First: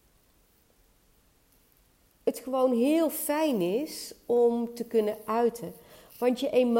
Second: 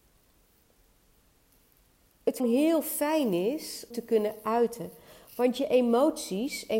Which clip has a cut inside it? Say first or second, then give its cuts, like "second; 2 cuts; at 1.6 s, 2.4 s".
second; 2 cuts; at 2.4 s, 3.9 s